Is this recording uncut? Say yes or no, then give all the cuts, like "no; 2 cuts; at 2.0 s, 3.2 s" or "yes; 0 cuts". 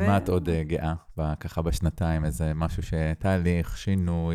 yes; 0 cuts